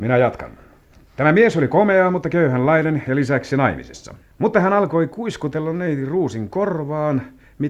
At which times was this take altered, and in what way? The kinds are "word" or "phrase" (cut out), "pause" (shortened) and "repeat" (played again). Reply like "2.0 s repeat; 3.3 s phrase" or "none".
4.2 s pause